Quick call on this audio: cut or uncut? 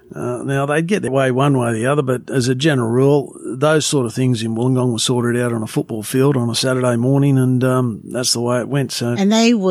cut